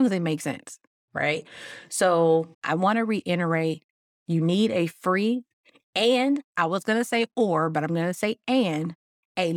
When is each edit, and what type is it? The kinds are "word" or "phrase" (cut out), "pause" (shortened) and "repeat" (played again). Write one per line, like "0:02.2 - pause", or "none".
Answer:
0:02.5 - pause